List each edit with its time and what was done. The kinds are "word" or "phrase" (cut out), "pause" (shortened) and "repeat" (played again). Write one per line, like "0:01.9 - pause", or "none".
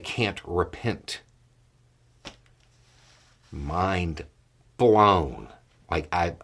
none